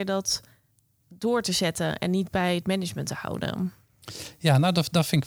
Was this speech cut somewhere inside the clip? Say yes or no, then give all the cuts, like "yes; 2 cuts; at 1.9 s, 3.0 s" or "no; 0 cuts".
no; 0 cuts